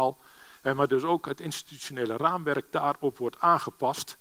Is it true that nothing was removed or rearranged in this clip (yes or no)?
yes